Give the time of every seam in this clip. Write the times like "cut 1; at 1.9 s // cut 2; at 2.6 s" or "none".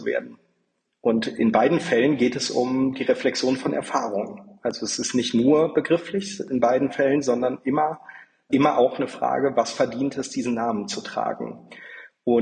none